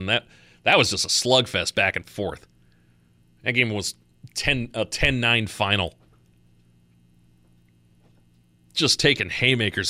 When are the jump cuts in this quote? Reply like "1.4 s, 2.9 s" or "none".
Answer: none

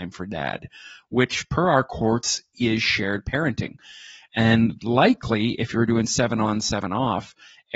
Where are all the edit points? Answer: none

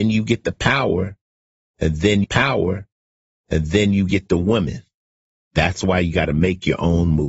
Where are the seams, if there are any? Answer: 2.2 s

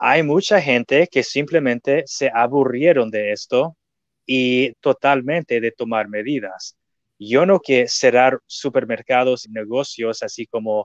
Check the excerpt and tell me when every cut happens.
4.7 s, 7.6 s, 9.4 s

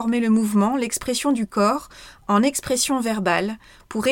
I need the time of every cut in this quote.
none

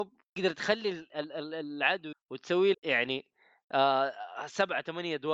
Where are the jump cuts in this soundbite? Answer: 2.1 s, 2.7 s

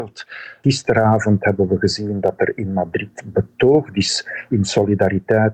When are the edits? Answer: none

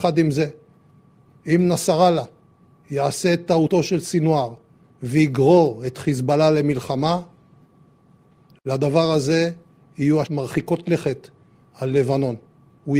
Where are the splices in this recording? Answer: 10.2 s

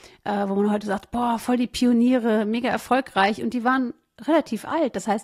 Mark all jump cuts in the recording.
none

